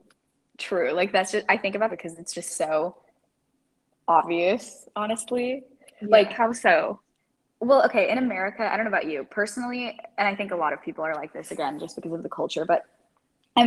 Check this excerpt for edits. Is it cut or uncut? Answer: cut